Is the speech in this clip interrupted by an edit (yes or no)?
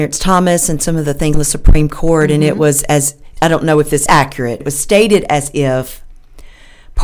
yes